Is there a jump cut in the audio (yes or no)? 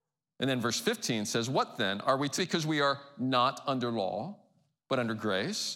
yes